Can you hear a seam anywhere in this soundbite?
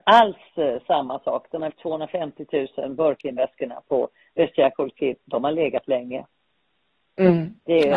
yes; 1 cut; at 1.7 s

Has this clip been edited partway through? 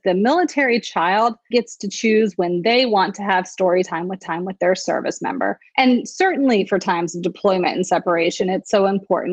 yes; 3 cuts; at 1.5 s, 4.2 s, 5.7 s

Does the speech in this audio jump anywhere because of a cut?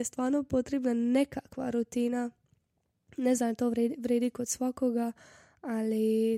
no; 0 cuts

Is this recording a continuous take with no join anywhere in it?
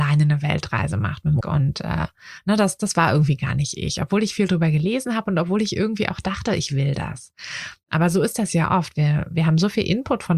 no; 1 cut; at 1.4 s

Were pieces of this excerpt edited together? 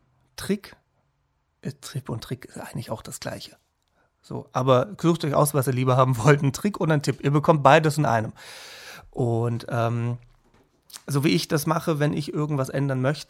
no; 0 cuts

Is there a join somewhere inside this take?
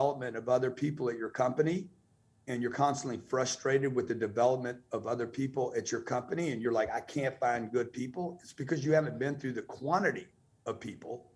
no; 0 cuts

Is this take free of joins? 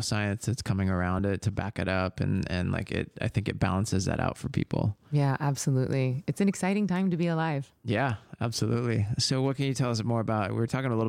yes; 0 cuts

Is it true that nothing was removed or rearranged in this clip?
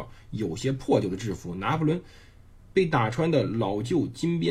yes; 0 cuts

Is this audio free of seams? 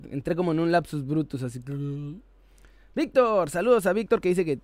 no; 1 cut; at 2.4 s

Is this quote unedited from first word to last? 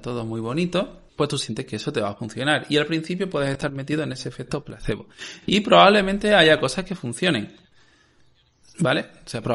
no; 1 cut; at 1.1 s

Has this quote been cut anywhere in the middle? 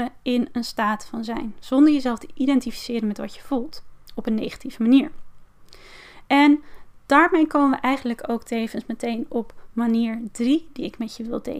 no; 0 cuts

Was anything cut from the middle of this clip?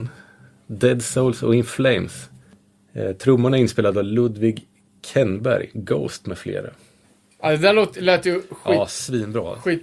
no; 0 cuts

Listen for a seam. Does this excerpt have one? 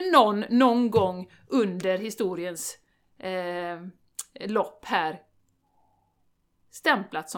no; 0 cuts

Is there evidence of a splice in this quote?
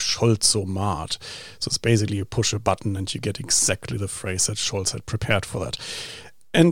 no; 0 cuts

